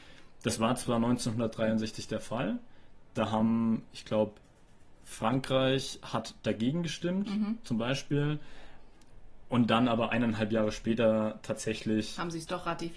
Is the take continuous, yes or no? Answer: no